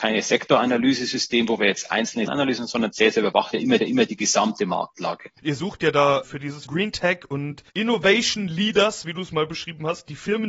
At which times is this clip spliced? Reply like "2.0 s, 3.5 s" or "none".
2.3 s, 3.8 s, 5.4 s, 6.7 s, 7.7 s